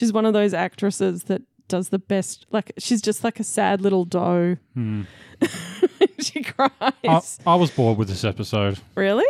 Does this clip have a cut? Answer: no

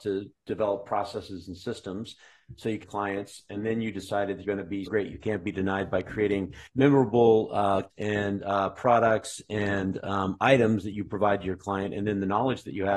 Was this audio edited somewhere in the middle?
yes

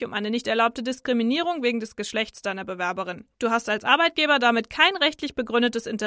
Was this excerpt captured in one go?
no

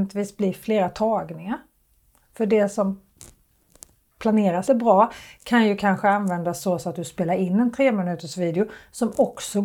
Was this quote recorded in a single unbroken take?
no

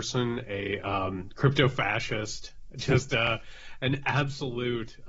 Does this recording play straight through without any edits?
yes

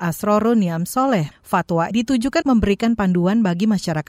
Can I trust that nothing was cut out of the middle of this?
no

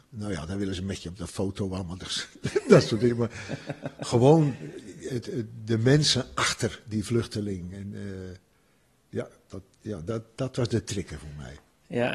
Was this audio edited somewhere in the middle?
no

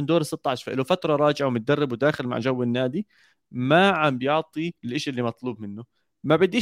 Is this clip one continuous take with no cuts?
no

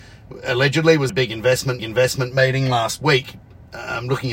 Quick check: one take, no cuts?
no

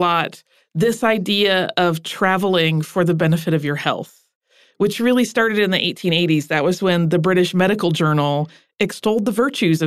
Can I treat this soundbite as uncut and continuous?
yes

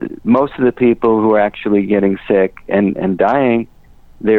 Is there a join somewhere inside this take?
no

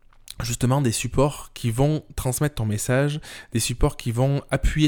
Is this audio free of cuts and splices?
yes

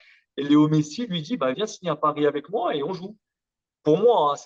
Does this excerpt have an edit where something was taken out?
yes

